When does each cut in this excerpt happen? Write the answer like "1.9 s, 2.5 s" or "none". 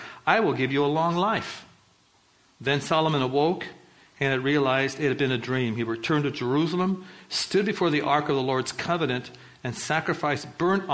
none